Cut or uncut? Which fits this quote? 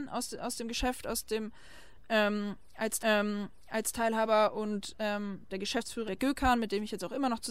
cut